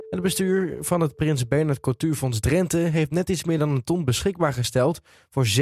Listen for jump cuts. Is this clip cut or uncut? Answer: uncut